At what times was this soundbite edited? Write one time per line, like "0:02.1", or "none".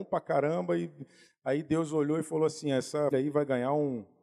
0:03.1